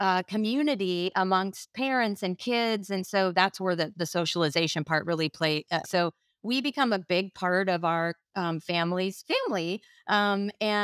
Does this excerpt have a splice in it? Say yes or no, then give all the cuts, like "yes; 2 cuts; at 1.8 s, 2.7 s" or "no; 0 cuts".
yes; 1 cut; at 5.8 s